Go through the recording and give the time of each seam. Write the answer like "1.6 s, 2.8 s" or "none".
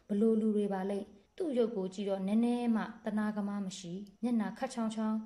1.3 s, 4.2 s